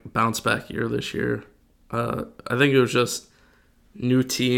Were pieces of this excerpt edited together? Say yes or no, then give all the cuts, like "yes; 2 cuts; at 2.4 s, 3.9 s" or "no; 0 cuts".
no; 0 cuts